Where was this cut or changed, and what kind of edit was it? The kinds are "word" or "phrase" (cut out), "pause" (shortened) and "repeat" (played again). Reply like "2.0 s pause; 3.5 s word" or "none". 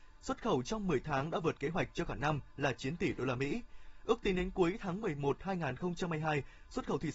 none